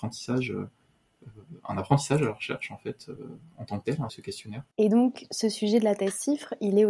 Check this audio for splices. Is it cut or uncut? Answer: cut